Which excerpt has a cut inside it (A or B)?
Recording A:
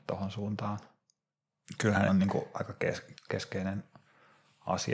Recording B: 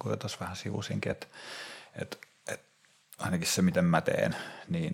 A